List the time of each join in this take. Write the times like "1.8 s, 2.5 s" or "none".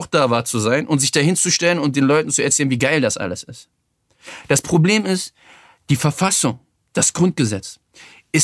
none